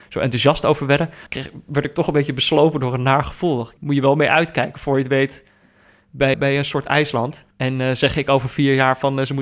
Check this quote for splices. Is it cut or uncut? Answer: cut